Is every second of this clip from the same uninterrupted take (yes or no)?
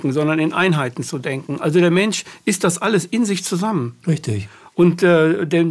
yes